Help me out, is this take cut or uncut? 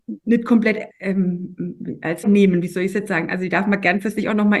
cut